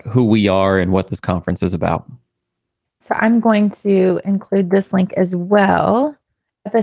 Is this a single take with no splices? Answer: yes; 0 cuts

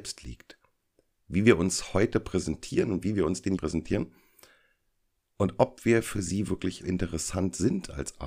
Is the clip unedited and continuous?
no; 2 cuts; at 3.6 s, 6.8 s

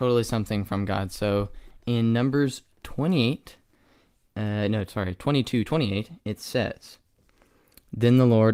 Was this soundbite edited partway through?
no; 0 cuts

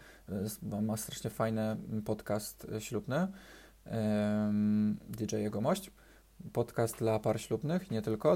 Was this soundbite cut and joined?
no; 0 cuts

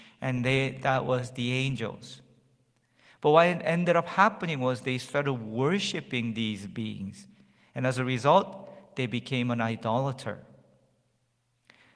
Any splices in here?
no; 0 cuts

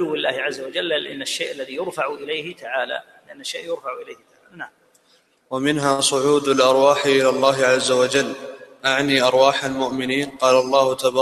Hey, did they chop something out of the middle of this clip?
no; 0 cuts

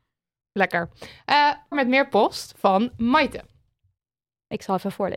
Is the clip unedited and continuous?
no; 1 cut; at 1.7 s

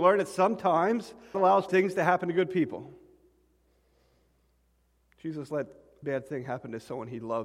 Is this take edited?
yes; 3 cuts; at 1.3 s, 1.7 s, 6.0 s

